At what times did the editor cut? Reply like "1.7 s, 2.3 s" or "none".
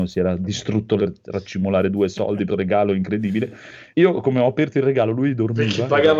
1.0 s, 2.5 s, 3.9 s